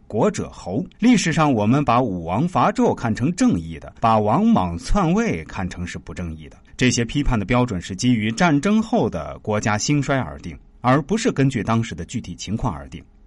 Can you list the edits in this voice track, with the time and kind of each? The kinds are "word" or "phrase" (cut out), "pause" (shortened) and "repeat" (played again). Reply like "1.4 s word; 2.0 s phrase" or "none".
0.9 s pause; 4.0 s pause; 6.7 s pause